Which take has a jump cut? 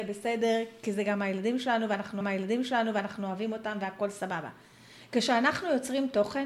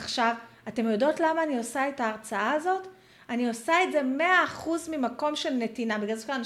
first; 1 cut; at 2.2 s

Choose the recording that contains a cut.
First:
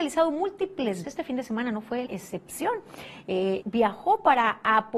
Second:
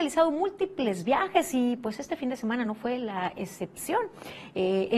first; 3 cuts; at 1.0 s, 2.1 s, 3.6 s

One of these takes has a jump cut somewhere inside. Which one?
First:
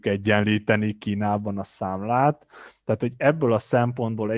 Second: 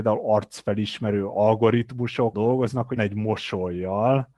second; 2 cuts; at 2.3 s, 3.0 s

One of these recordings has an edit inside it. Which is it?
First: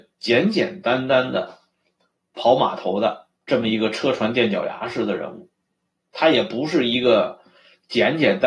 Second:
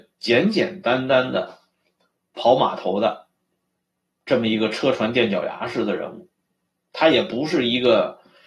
first; 1 cut; at 3.4 s

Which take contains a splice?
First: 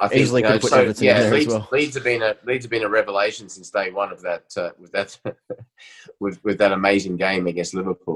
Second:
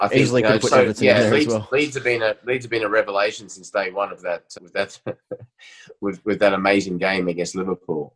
second; 1 cut; at 4.5 s

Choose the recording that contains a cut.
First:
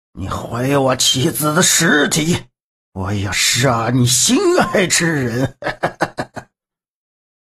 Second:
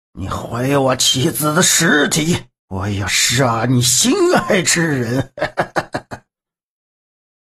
second; 1 cut; at 2.6 s

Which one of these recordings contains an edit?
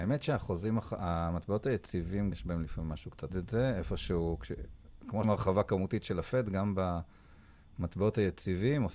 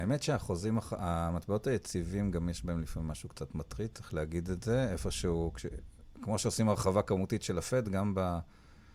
first; 3 cuts; at 2.3 s, 3.3 s, 5.2 s

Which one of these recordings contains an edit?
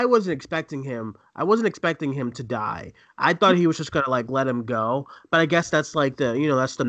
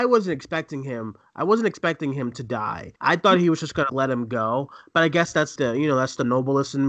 second; 3 cuts; at 3.0 s, 3.9 s, 5.6 s

